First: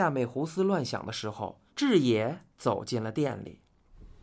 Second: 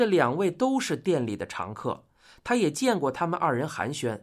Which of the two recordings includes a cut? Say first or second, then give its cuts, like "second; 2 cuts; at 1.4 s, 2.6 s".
first; 1 cut; at 1.7 s